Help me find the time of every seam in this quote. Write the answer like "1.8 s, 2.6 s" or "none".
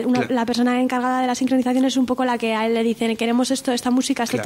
none